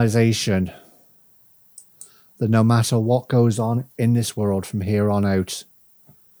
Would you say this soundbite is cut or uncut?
uncut